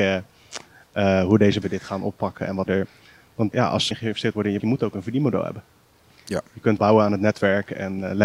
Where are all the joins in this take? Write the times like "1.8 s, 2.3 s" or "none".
1.6 s, 2.7 s, 3.5 s, 3.9 s, 4.6 s, 6.8 s